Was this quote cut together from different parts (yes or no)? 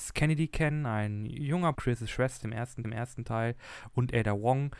yes